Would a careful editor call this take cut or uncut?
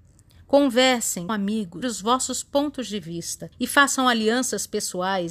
cut